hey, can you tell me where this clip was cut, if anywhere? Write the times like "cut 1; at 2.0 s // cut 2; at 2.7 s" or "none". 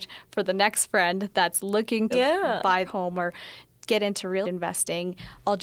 cut 1; at 2.1 s // cut 2; at 2.9 s // cut 3; at 4.4 s

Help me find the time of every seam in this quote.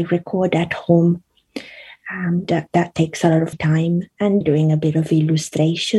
cut 1; at 2.4 s // cut 2; at 3.5 s // cut 3; at 4.4 s

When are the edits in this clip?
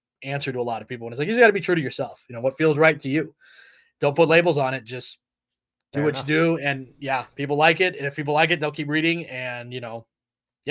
none

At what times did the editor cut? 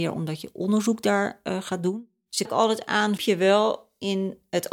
cut 1; at 2.4 s // cut 2; at 3.2 s

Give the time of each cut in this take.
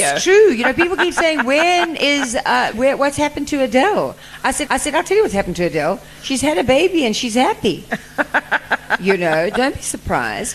cut 1; at 2.7 s // cut 2; at 4.7 s

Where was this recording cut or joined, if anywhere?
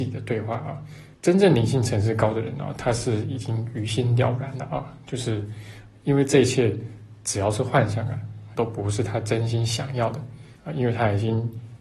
cut 1; at 1.1 s // cut 2; at 8.5 s // cut 3; at 10.6 s

